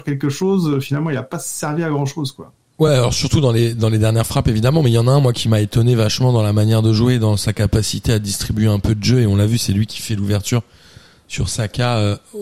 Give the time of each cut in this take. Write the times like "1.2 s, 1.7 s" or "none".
none